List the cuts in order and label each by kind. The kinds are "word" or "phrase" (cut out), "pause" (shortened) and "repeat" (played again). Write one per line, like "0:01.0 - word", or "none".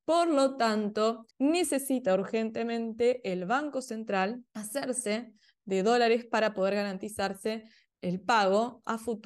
0:01.3 - pause
0:04.5 - pause
0:07.9 - word